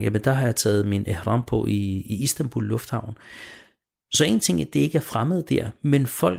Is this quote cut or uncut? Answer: uncut